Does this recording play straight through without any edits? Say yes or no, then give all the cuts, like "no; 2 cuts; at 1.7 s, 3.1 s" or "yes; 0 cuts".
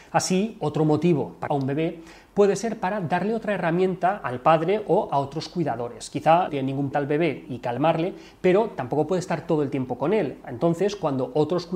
no; 4 cuts; at 1.5 s, 6.5 s, 6.9 s, 7.5 s